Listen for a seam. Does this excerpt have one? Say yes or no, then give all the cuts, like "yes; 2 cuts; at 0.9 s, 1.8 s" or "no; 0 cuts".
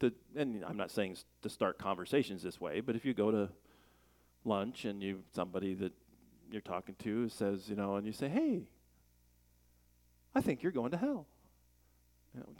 no; 0 cuts